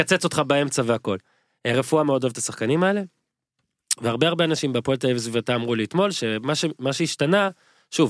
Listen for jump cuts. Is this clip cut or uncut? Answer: uncut